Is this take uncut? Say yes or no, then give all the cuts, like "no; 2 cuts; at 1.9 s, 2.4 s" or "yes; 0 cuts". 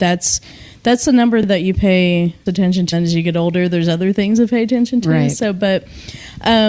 no; 2 cuts; at 2.5 s, 2.9 s